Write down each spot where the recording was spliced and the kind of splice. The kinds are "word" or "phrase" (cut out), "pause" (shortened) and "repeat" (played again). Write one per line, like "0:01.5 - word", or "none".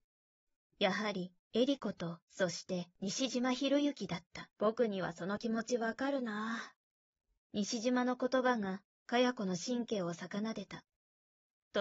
0:02.3 - pause
0:04.5 - pause
0:06.9 - pause